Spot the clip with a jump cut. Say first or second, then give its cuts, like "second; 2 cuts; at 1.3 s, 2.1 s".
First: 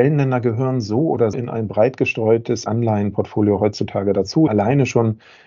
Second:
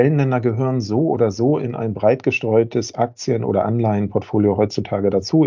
first; 3 cuts; at 1.3 s, 2.7 s, 4.5 s